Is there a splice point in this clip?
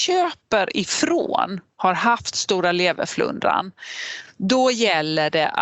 no; 0 cuts

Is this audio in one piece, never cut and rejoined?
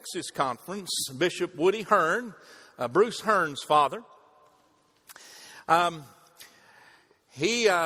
yes; 0 cuts

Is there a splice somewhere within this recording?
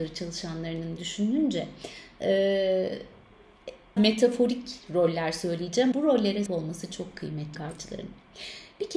yes; 5 cuts; at 1.0 s, 4.0 s, 5.9 s, 6.5 s, 7.5 s

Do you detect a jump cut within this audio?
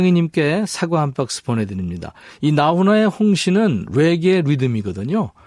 no; 0 cuts

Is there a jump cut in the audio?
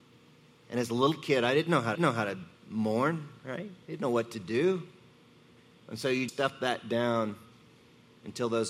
yes; 3 cuts; at 1.9 s, 3.8 s, 6.3 s

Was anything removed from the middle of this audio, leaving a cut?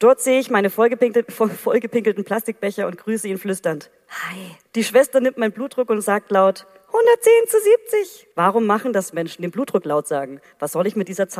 yes; 2 cuts; at 4.7 s, 8.3 s

